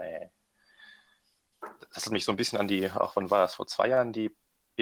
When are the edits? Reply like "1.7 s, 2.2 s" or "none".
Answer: none